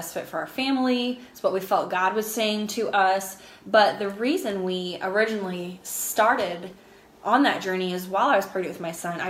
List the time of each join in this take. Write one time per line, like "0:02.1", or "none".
none